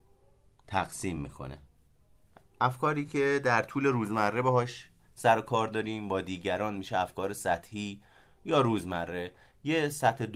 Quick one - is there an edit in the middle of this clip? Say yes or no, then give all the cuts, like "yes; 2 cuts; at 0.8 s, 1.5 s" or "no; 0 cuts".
no; 0 cuts